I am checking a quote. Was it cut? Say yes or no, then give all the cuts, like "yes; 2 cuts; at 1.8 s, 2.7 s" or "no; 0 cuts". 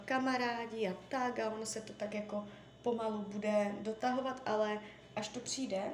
no; 0 cuts